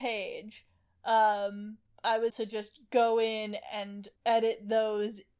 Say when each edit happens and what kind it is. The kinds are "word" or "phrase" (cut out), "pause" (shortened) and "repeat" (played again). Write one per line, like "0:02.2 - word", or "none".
0:01.9 - pause
0:02.3 - word
0:04.2 - pause